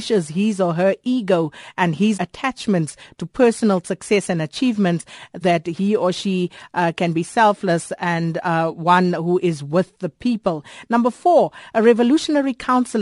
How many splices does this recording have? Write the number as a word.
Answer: two